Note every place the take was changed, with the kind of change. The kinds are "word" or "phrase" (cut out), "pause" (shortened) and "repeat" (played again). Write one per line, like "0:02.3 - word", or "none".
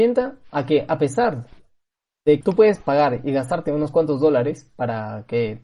0:02.4 - word